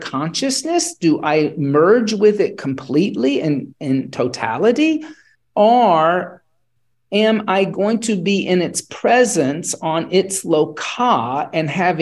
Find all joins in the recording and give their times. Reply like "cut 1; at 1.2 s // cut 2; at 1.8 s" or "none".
cut 1; at 5.3 s